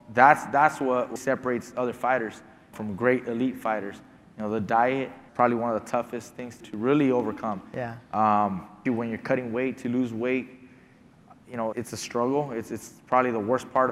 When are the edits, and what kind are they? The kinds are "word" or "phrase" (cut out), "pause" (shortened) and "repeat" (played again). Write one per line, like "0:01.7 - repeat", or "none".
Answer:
0:01.2 - word
0:02.7 - word
0:05.3 - word
0:06.6 - word
0:08.9 - word
0:11.7 - word